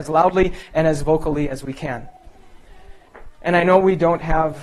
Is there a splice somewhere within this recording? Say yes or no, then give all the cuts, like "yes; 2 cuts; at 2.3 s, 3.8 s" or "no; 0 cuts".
no; 0 cuts